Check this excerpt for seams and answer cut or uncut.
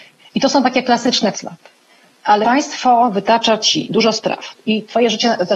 cut